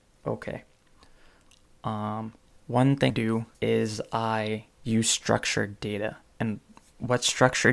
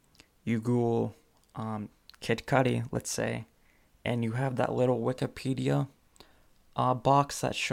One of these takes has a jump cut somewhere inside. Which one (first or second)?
first